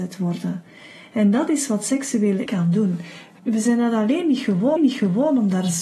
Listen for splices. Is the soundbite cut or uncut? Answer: cut